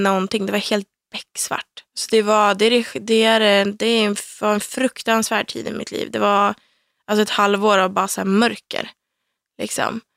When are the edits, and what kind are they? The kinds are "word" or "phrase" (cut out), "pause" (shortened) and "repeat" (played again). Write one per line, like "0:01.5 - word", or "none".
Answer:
0:01.9 - pause